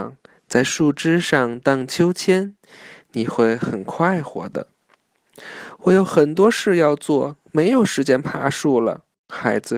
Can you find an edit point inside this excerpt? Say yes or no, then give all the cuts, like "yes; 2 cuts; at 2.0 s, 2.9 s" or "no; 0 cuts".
no; 0 cuts